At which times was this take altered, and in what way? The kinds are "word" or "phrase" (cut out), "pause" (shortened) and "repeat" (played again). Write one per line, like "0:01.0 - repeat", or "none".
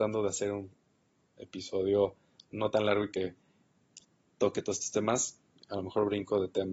none